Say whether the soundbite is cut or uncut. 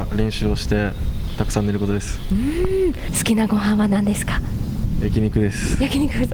uncut